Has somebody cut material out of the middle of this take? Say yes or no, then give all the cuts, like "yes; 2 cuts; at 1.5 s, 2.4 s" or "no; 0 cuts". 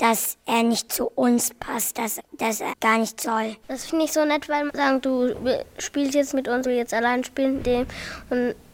yes; 8 cuts; at 2.2 s, 2.7 s, 3.2 s, 3.9 s, 4.7 s, 6.3 s, 6.6 s, 7.6 s